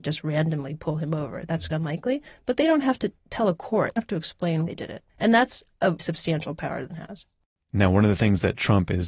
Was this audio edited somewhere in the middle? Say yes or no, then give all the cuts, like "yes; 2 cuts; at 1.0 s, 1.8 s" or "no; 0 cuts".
yes; 6 cuts; at 1.7 s, 4.0 s, 4.7 s, 5.1 s, 6.0 s, 6.9 s